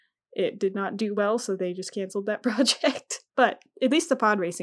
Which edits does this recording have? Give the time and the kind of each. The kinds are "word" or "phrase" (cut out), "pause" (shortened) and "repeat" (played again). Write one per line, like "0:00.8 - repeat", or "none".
none